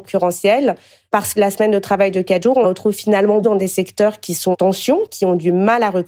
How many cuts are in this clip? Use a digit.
4